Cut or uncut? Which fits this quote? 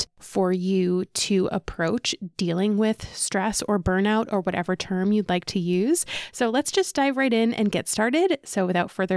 uncut